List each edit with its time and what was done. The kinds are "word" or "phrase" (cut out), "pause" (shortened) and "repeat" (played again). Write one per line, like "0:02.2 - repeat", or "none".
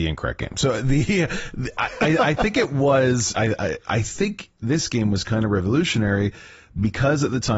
none